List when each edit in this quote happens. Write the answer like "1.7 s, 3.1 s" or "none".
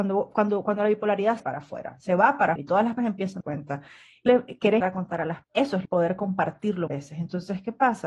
1.4 s, 2.6 s, 3.0 s, 3.4 s, 4.3 s, 4.8 s, 5.4 s, 5.8 s, 6.9 s